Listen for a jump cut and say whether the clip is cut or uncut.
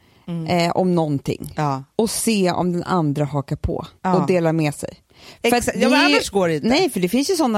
cut